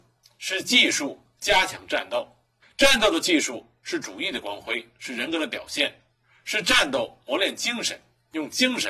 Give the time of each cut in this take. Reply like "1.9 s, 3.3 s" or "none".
2.6 s